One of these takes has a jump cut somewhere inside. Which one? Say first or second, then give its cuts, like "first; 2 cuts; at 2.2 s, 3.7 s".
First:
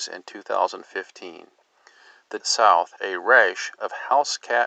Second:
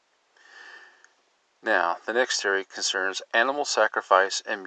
first; 2 cuts; at 2.4 s, 3.0 s